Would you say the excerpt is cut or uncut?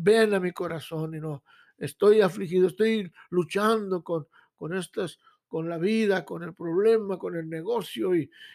uncut